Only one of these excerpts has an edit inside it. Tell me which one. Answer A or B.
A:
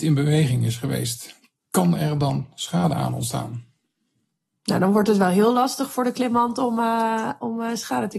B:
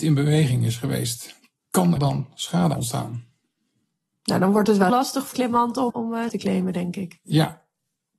B